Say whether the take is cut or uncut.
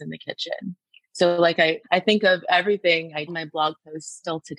cut